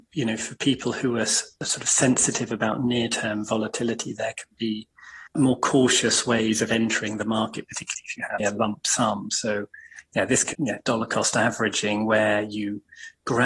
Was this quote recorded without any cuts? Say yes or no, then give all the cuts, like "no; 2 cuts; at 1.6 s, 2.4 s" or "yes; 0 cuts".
no; 3 cuts; at 5.3 s, 8.4 s, 10.5 s